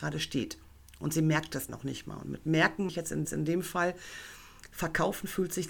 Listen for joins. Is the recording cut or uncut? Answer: cut